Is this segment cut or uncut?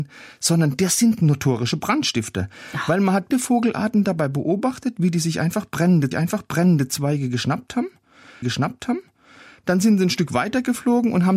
cut